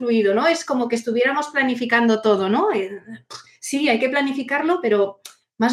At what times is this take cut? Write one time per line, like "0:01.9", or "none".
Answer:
none